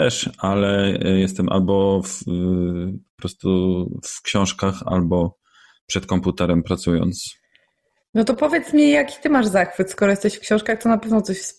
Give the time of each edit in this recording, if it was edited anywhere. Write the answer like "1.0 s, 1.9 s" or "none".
none